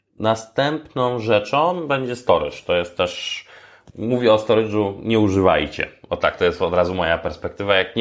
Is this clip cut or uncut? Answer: uncut